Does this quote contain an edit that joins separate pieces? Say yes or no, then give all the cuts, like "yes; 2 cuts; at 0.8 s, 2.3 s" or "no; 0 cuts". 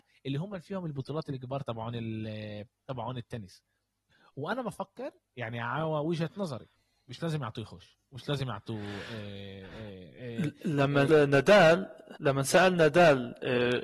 yes; 3 cuts; at 6.8 s, 11.1 s, 12.2 s